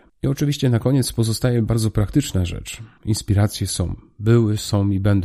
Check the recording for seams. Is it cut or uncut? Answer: uncut